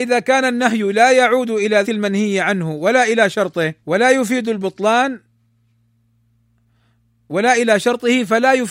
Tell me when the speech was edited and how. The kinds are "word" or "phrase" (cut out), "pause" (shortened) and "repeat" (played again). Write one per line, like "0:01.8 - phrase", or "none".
0:01.8 - word
0:03.8 - pause